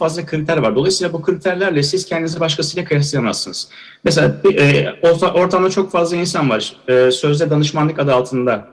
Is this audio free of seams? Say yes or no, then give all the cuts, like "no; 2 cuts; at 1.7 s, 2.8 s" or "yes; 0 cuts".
yes; 0 cuts